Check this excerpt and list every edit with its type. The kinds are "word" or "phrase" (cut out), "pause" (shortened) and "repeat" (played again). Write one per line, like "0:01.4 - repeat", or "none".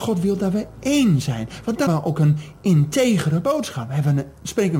0:01.9 - word